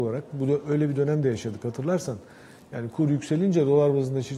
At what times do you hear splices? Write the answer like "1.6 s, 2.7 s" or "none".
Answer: none